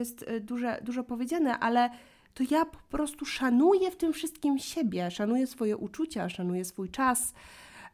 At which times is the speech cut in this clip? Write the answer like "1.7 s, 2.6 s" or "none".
none